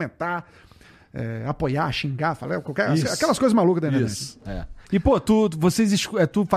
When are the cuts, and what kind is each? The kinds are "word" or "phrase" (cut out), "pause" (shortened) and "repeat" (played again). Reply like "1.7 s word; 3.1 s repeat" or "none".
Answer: 4.8 s pause